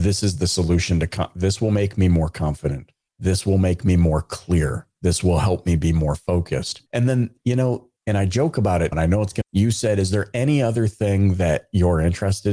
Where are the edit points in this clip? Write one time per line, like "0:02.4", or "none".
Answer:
0:03.1
0:06.9
0:08.0
0:08.9
0:09.4